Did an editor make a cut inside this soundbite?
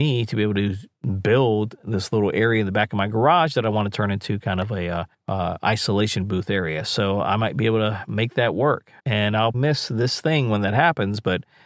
yes; 3 cuts; at 5.1 s, 9.0 s, 9.5 s

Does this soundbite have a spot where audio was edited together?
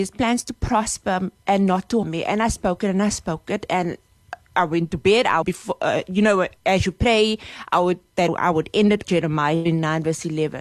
yes; 5 cuts; at 2.0 s, 5.4 s, 6.6 s, 8.3 s, 9.0 s

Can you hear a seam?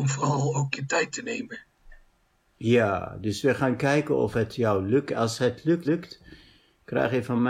yes; 1 cut; at 5.8 s

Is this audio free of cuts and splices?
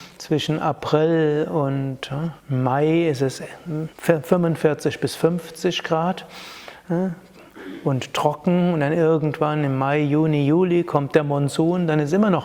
no; 2 cuts; at 2.4 s, 3.9 s

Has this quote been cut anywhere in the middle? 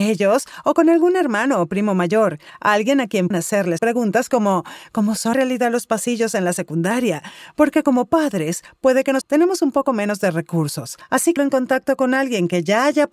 yes; 5 cuts; at 3.3 s, 3.8 s, 5.3 s, 9.2 s, 11.4 s

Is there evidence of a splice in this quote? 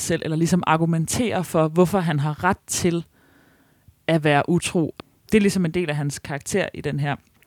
no; 0 cuts

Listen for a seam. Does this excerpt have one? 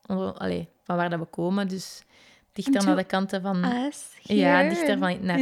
no; 0 cuts

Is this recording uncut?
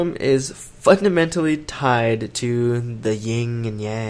yes; 0 cuts

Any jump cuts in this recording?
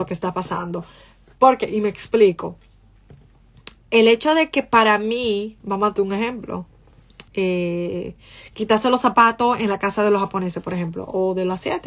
yes; 2 cuts; at 5.6 s, 7.3 s

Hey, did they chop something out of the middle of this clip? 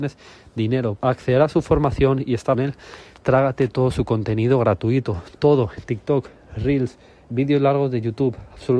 yes; 3 cuts; at 1.0 s, 2.5 s, 7.2 s

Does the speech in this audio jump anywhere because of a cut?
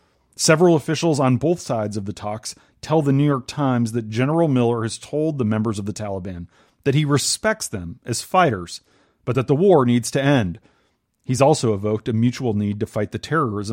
no; 0 cuts

